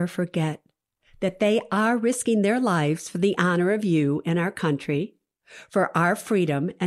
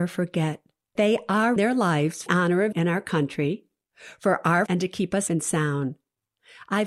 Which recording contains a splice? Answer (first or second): second